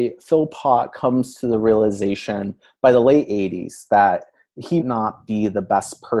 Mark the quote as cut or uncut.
cut